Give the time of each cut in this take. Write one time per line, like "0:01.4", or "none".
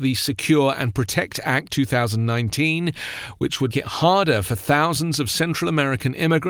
0:01.7
0:03.7

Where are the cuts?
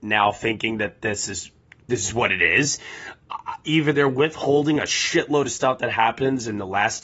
none

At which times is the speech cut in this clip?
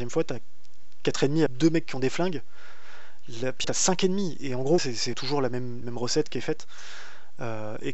0:01.5
0:03.6
0:04.8
0:05.1
0:05.8

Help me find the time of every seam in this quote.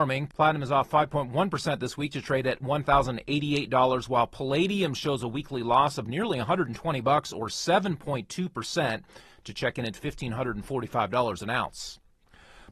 none

